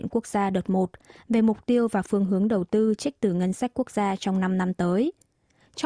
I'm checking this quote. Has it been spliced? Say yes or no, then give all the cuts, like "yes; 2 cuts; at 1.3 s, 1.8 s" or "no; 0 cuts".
no; 0 cuts